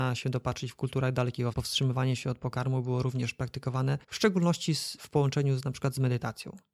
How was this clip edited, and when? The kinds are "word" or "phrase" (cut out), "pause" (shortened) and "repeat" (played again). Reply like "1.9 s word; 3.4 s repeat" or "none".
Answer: 1.5 s phrase; 4.0 s pause

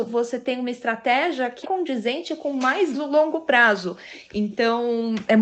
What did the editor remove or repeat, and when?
1.6 s word; 2.9 s word

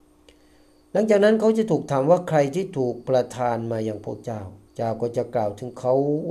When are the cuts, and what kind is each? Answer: 4.7 s pause

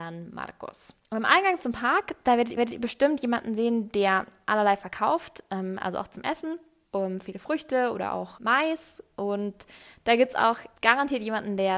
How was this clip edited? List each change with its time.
1.0 s pause; 2.6 s repeat; 8.4 s word; 10.8 s pause

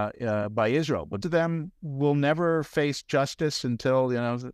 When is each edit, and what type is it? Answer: 1.2 s word; 1.8 s pause

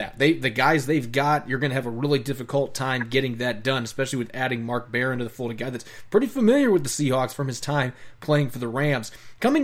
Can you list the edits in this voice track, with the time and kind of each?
none

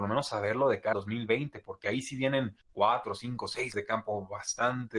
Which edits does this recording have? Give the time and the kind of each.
0.9 s word; 2.6 s pause; 3.7 s word

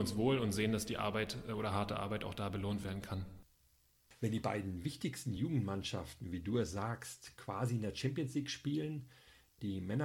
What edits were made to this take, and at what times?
none

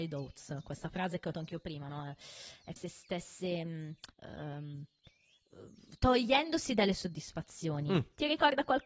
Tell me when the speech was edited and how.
1.3 s word; 2.8 s word; 4.1 s pause

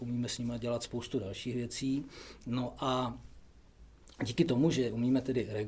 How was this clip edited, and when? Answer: none

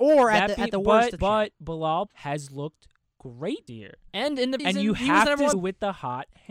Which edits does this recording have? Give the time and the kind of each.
1.2 s word; 2.1 s word; 3.7 s word; 4.6 s word; 5.5 s word

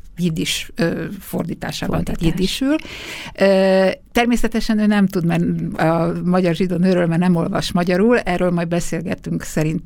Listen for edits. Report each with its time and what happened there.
none

